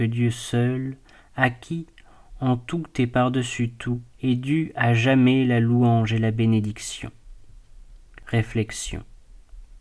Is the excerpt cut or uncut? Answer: cut